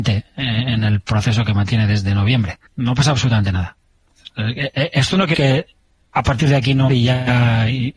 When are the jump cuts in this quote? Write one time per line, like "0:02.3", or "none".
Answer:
0:02.7
0:05.3
0:06.9